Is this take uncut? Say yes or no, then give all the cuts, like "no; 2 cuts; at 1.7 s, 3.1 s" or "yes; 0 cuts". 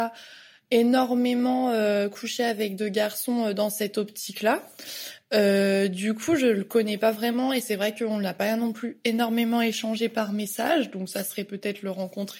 yes; 0 cuts